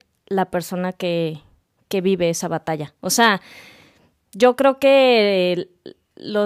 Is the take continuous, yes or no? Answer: yes